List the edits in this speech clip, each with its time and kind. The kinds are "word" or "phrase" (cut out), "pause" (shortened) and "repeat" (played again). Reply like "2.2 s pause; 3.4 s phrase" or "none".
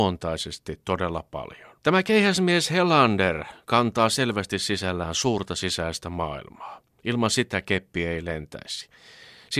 1.8 s pause